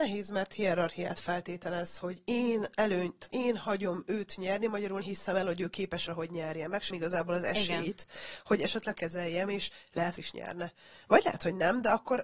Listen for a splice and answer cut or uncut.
cut